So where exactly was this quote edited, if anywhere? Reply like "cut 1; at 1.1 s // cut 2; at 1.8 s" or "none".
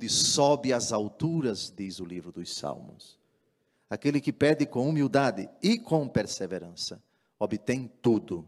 none